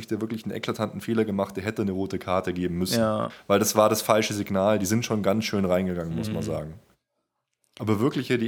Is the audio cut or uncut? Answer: uncut